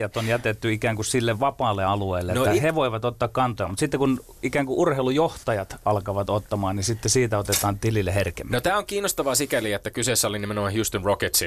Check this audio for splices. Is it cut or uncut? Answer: uncut